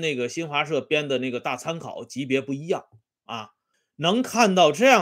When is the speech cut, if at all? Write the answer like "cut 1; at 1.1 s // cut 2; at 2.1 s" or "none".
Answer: cut 1; at 3.7 s